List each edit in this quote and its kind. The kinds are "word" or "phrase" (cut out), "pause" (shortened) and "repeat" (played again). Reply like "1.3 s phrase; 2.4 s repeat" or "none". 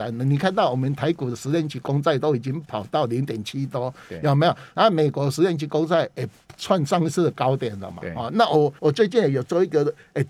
8.8 s pause